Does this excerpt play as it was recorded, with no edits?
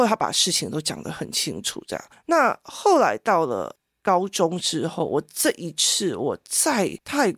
yes; 0 cuts

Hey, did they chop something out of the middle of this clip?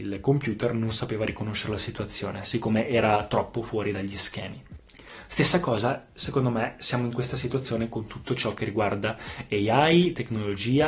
no; 0 cuts

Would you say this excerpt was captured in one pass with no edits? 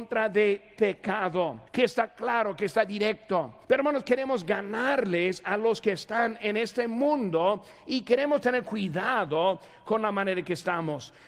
no; 2 cuts; at 1.7 s, 3.6 s

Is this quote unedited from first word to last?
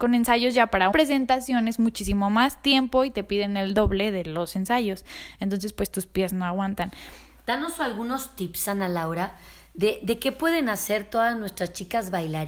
no; 1 cut; at 0.9 s

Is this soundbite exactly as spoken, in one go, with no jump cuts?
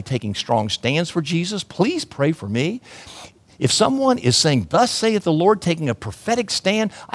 yes; 0 cuts

